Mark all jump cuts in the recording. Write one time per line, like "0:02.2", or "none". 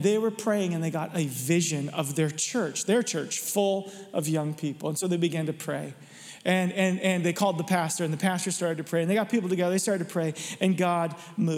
none